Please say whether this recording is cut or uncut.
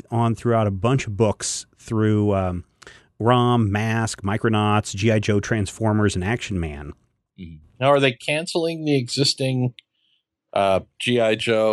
uncut